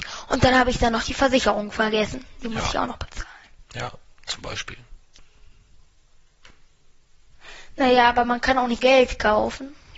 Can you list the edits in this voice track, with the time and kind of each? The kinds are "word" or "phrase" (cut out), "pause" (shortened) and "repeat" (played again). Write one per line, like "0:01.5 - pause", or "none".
0:08.8 - phrase